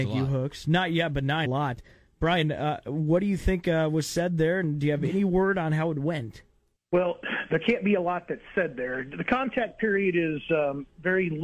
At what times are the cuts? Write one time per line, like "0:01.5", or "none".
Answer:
0:01.4
0:06.8